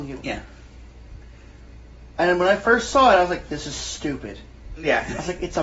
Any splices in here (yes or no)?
no